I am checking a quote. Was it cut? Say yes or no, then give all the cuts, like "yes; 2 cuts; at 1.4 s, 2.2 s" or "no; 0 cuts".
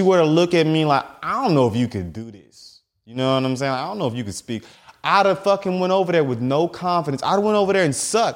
no; 0 cuts